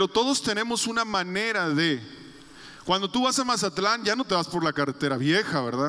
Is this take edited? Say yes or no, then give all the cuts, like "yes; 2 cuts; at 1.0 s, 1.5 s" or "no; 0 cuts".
no; 0 cuts